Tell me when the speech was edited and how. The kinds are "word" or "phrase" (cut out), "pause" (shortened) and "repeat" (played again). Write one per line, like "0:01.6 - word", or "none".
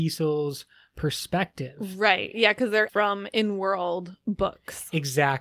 0:02.9 - word